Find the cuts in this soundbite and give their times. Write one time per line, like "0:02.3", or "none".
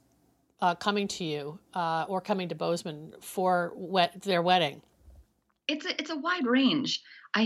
none